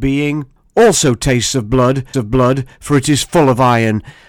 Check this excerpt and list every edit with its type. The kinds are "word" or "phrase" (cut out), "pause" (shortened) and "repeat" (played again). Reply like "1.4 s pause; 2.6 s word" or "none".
2.1 s repeat